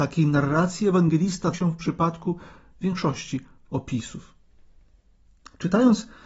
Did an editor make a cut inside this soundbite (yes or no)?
yes